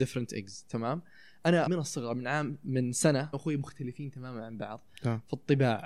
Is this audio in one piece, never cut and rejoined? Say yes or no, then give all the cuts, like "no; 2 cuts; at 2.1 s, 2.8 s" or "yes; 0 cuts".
no; 2 cuts; at 1.7 s, 3.3 s